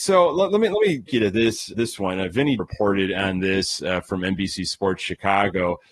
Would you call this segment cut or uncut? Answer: cut